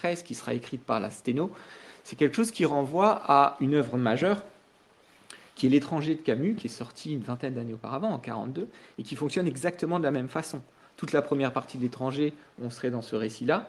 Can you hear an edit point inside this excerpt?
no; 0 cuts

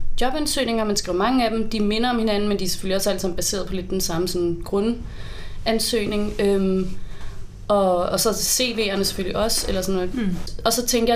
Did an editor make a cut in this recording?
no; 0 cuts

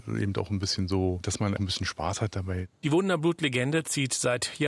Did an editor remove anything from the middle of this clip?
yes; 1 cut; at 1.6 s

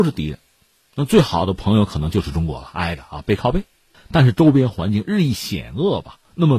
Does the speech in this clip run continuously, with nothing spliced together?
yes; 0 cuts

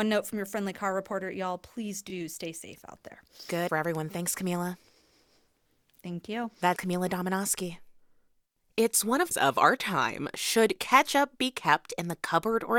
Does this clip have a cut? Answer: yes; 3 cuts; at 3.7 s, 6.8 s, 9.3 s

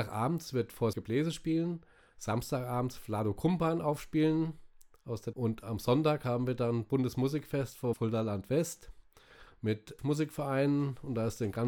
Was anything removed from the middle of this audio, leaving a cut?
yes; 4 cuts; at 0.9 s, 5.3 s, 7.9 s, 10.0 s

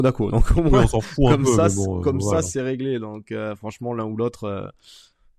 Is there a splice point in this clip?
no; 0 cuts

